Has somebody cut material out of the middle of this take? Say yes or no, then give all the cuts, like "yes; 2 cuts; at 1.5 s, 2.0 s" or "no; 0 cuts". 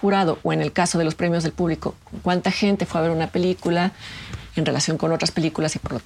no; 0 cuts